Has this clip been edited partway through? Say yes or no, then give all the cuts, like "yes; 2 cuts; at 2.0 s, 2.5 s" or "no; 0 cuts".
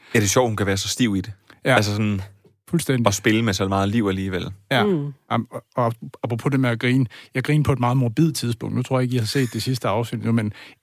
no; 0 cuts